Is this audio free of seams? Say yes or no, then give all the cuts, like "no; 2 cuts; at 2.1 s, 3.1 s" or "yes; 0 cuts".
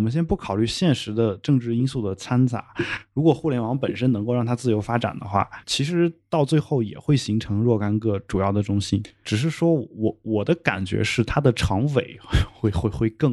no; 1 cut; at 5.6 s